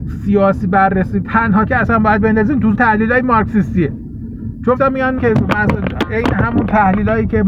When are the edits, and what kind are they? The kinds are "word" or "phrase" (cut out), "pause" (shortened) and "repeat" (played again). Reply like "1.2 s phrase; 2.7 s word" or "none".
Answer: 1.2 s word; 1.7 s word; 2.7 s word; 4.8 s word; 5.2 s word